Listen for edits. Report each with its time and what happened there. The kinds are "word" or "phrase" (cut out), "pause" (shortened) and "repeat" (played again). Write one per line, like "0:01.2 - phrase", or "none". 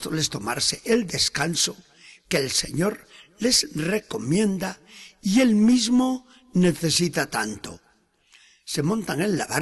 none